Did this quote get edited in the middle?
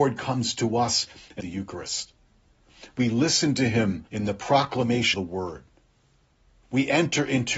yes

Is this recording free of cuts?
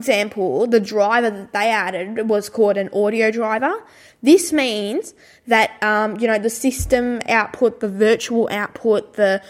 yes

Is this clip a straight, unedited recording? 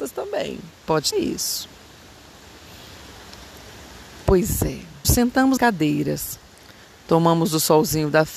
no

